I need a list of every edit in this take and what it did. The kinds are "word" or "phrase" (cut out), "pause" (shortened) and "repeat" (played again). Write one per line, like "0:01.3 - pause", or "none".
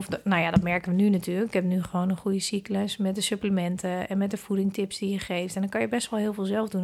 none